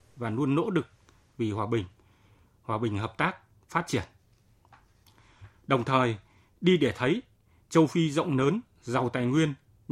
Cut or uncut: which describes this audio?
uncut